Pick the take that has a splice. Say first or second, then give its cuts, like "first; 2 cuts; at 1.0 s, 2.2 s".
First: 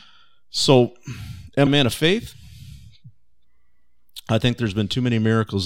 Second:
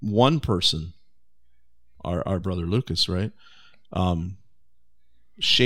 first; 1 cut; at 1.7 s